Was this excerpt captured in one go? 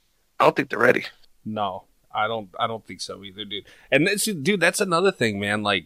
yes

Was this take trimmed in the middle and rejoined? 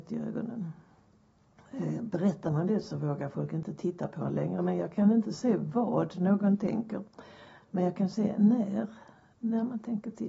no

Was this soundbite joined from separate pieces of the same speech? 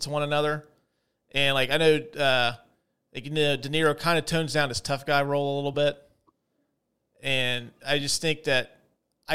no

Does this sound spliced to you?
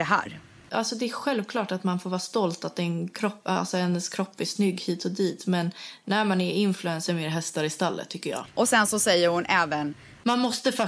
yes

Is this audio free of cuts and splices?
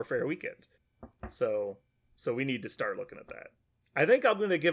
yes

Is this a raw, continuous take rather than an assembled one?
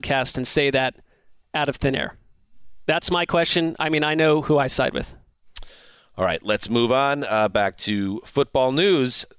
yes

